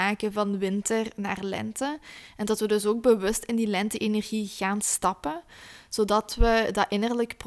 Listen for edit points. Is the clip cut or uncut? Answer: uncut